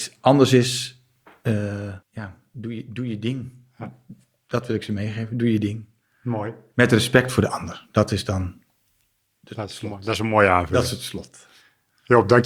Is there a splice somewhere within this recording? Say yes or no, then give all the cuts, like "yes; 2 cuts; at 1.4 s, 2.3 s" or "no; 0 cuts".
yes; 1 cut; at 2.0 s